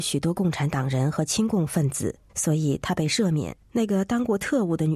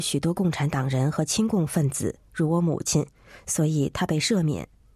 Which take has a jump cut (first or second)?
first